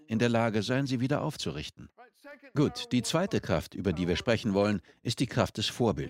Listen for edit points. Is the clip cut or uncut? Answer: uncut